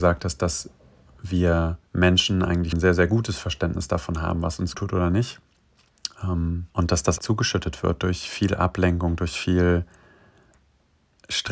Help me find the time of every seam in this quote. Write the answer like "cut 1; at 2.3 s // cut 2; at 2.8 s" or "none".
cut 1; at 1.9 s // cut 2; at 2.7 s // cut 3; at 4.7 s // cut 4; at 6.7 s // cut 5; at 7.2 s